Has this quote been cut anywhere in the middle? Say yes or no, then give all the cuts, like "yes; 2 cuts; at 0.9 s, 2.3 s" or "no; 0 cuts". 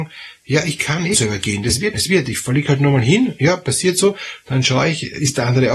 yes; 2 cuts; at 1.1 s, 1.9 s